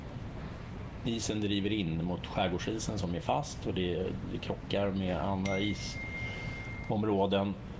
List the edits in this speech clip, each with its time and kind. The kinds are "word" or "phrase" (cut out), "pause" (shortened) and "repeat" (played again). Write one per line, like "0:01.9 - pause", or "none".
none